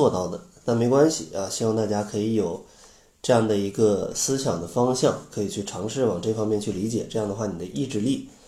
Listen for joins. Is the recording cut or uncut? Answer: cut